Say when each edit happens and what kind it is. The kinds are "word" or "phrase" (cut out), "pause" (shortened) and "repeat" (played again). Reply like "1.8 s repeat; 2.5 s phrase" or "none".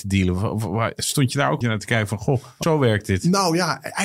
1.6 s word; 2.6 s word

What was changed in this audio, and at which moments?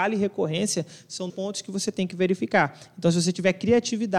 1.3 s word

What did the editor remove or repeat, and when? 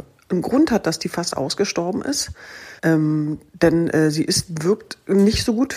2.8 s pause

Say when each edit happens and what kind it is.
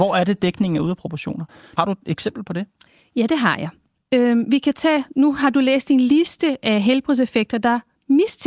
none

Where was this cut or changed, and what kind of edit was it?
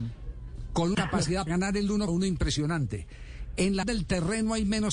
0.9 s word; 1.5 s word; 2.1 s word; 3.8 s word

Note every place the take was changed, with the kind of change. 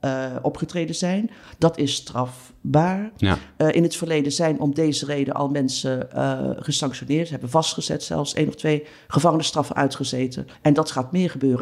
10.5 s pause

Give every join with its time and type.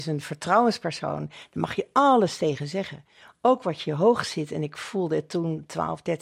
none

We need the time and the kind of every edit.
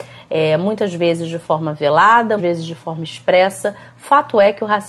2.4 s word

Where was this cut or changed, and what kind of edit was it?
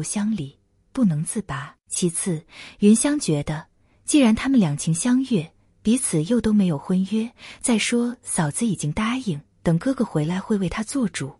1.8 s pause; 9.5 s pause

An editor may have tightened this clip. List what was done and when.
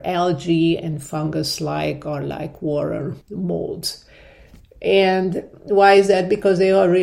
3.2 s pause

